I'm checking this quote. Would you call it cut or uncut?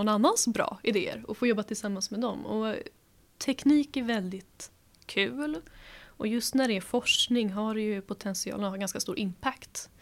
uncut